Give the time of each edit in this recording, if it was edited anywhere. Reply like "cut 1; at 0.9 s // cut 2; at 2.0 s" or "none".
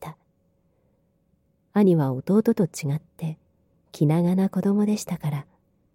none